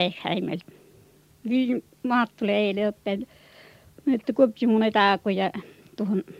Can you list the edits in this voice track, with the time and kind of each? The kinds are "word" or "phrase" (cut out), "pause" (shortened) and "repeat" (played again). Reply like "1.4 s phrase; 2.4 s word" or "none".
none

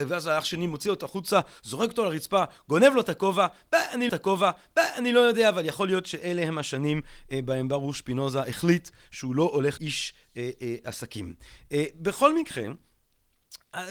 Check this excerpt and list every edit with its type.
4.1 s repeat; 9.8 s phrase

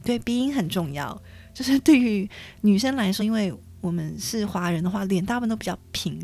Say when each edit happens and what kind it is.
3.2 s phrase

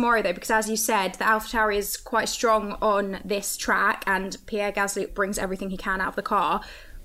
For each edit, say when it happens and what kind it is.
5.1 s word

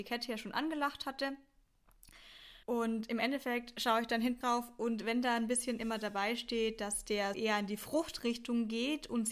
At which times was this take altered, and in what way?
2.6 s pause; 4.4 s phrase; 7.3 s word

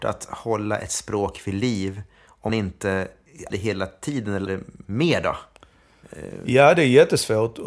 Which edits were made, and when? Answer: 2.5 s word; 3.5 s word; 4.5 s word; 4.8 s word

